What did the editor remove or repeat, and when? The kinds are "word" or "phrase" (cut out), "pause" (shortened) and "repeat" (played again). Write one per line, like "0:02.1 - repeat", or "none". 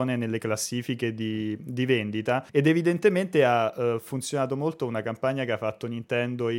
0:02.5 - pause